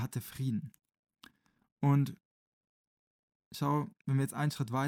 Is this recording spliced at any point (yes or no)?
no